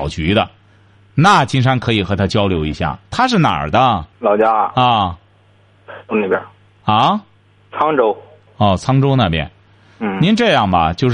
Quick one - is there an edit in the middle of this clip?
yes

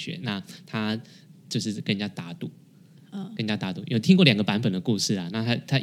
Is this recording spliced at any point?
no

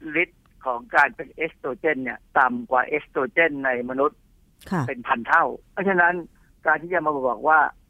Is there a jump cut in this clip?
yes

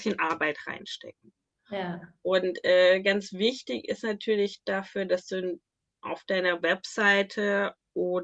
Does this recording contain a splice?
no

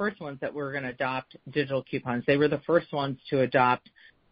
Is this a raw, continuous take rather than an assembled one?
yes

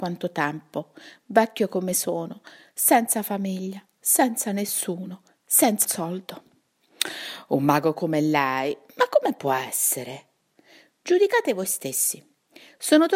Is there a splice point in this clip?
yes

